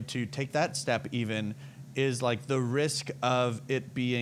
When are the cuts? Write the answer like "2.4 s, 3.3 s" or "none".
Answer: none